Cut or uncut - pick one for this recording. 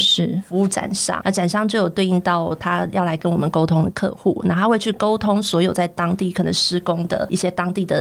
cut